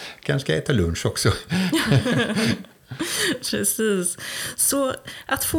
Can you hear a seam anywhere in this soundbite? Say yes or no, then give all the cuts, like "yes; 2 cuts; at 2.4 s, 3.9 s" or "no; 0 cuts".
no; 0 cuts